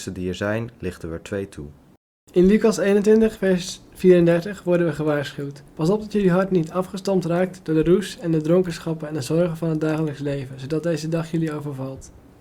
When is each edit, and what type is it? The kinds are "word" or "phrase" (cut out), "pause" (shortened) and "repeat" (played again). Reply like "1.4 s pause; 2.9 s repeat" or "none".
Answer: 5.7 s pause